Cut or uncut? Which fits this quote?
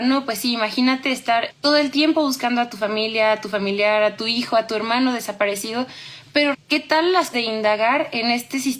cut